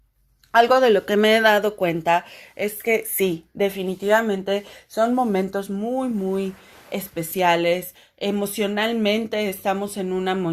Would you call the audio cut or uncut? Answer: uncut